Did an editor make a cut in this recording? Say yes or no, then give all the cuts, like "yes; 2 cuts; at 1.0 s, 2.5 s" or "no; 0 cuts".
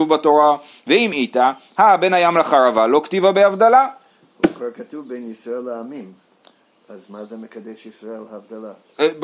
no; 0 cuts